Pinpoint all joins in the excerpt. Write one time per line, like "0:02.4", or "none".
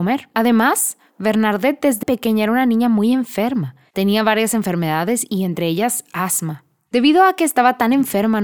0:02.0

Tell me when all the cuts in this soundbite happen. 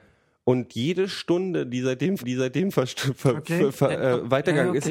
0:02.2
0:03.9

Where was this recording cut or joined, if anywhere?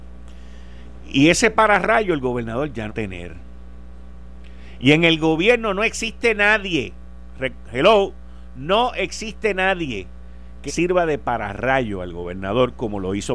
0:02.9
0:10.7

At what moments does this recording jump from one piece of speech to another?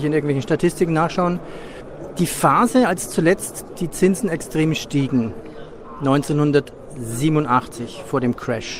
none

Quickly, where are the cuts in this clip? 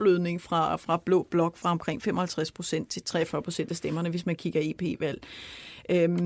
none

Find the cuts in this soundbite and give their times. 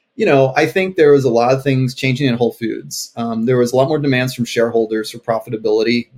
none

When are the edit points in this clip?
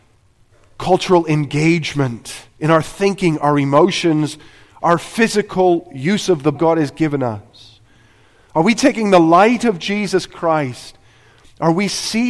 0:06.5

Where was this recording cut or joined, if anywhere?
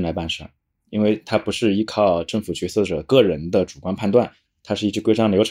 none

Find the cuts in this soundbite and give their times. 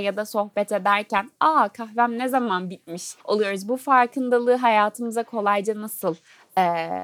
0:03.2

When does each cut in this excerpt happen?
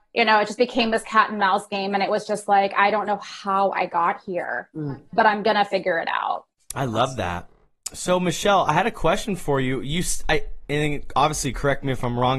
0:06.5

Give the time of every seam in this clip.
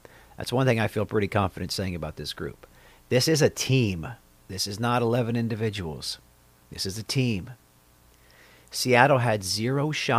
none

